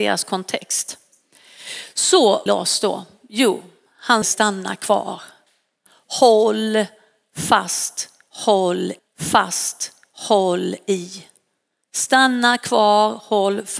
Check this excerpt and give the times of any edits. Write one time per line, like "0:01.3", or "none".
0:02.5
0:04.2
0:09.0